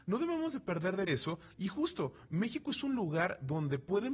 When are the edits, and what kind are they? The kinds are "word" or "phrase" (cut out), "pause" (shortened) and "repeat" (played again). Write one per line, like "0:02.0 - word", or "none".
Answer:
0:01.1 - word